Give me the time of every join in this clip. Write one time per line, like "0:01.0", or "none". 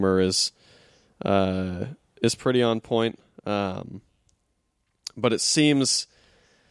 none